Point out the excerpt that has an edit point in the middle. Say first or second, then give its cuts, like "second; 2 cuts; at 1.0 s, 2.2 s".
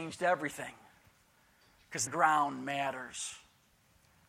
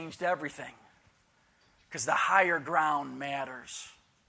first; 1 cut; at 2.1 s